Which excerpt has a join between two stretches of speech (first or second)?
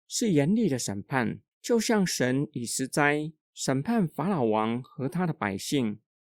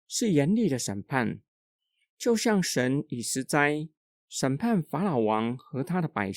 first